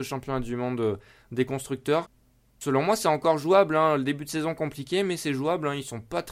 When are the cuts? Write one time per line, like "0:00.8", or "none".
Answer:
none